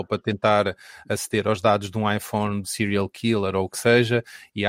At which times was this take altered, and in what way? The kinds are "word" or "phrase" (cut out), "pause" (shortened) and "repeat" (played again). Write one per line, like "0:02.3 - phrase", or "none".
0:02.6 - phrase